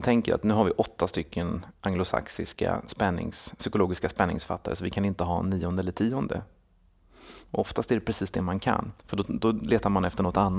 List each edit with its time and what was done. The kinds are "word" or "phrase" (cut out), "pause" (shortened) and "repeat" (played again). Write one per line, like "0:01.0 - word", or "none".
0:09.0 - pause